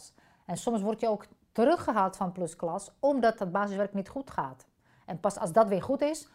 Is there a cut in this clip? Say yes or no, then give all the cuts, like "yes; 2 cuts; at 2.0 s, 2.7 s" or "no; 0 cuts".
no; 0 cuts